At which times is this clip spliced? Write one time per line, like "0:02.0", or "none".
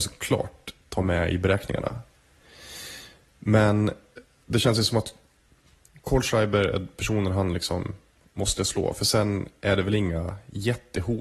none